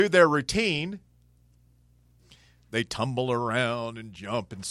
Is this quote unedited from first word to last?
yes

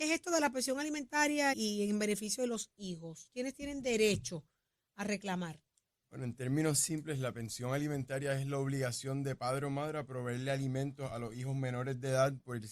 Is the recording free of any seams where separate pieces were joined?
no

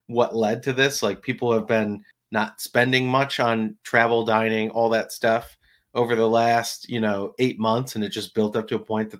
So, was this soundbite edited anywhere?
no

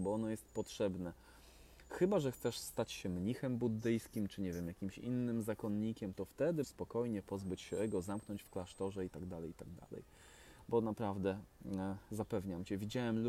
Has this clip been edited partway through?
yes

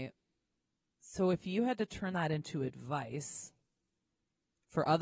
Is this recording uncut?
yes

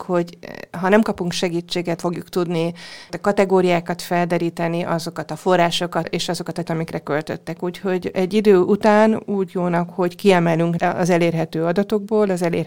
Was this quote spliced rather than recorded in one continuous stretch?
yes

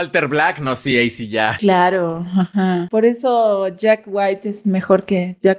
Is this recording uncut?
yes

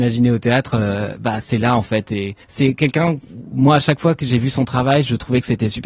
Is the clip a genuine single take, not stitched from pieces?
no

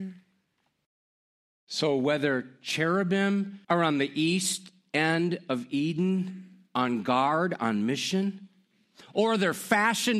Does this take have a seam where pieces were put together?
yes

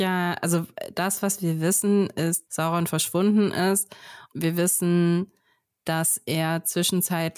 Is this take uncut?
no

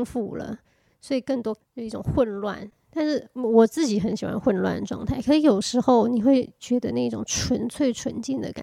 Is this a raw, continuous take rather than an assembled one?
no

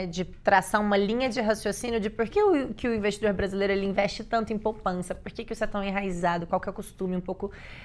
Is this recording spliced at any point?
yes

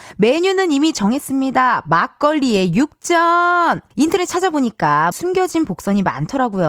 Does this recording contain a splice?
yes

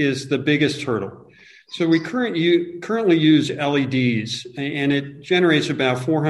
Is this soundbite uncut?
yes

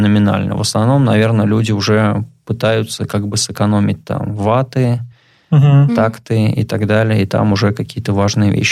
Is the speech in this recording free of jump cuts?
yes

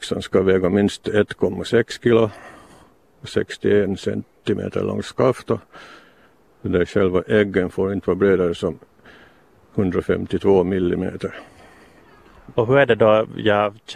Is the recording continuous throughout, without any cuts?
yes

